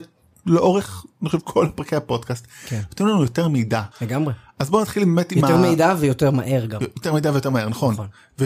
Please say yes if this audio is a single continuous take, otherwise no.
no